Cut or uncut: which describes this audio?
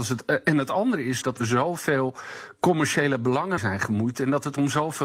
cut